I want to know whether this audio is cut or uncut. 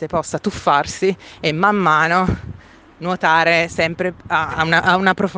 uncut